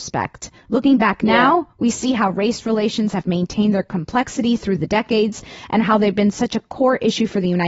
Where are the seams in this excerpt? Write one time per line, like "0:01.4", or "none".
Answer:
none